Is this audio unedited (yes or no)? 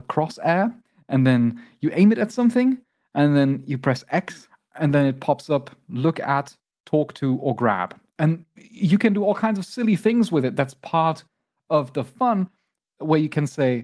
yes